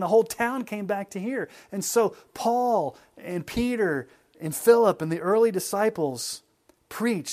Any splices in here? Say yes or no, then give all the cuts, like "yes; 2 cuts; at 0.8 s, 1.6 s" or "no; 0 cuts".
no; 0 cuts